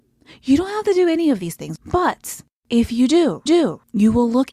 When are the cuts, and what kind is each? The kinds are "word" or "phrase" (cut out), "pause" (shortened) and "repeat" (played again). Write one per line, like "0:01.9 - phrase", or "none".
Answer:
0:03.5 - repeat